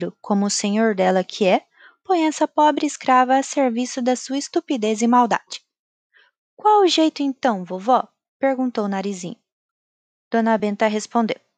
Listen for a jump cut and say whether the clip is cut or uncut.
uncut